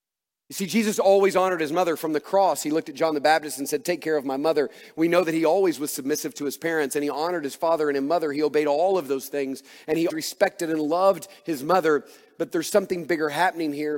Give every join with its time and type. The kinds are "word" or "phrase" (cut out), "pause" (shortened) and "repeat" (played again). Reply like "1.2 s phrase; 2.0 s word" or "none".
10.1 s word